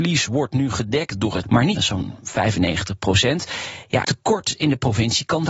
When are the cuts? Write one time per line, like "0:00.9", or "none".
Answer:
0:01.4
0:01.8
0:04.0